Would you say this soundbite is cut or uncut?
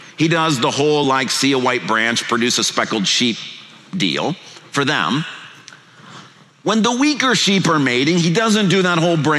uncut